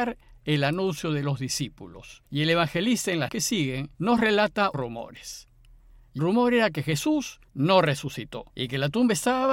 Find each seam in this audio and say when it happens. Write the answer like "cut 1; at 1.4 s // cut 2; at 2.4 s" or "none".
cut 1; at 2.3 s // cut 2; at 3.3 s // cut 3; at 3.9 s // cut 4; at 4.7 s // cut 5; at 6.2 s // cut 6; at 7.5 s // cut 7; at 8.5 s